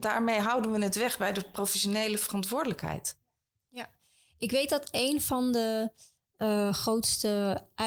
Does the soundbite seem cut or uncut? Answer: uncut